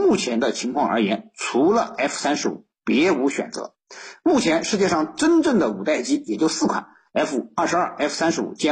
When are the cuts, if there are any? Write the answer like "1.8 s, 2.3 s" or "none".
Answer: none